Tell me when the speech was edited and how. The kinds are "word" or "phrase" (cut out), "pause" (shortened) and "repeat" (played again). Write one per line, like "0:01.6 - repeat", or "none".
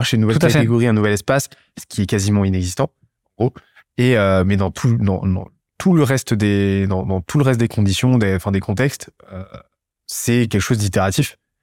none